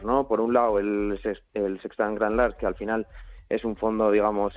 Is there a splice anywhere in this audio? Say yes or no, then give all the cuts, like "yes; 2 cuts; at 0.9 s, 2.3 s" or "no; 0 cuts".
no; 0 cuts